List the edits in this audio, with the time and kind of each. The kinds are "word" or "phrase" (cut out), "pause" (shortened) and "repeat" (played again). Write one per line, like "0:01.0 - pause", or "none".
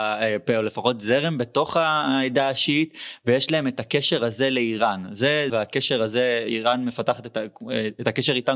0:05.5 - phrase